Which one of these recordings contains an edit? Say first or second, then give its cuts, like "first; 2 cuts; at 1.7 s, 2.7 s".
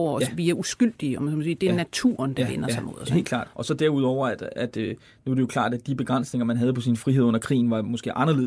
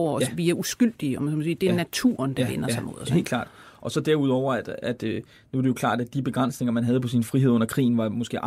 first; 1 cut; at 3.5 s